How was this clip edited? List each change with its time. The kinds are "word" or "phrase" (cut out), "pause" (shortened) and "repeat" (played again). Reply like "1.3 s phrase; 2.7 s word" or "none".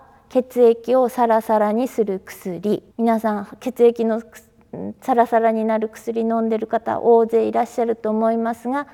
2.9 s pause